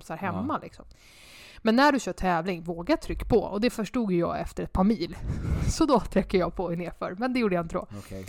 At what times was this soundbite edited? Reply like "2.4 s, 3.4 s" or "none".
none